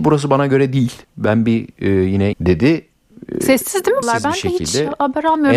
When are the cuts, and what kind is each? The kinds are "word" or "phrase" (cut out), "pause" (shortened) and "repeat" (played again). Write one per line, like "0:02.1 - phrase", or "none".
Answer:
0:01.0 - pause
0:02.3 - phrase
0:04.0 - word